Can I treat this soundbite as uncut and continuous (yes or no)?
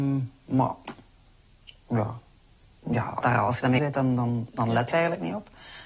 no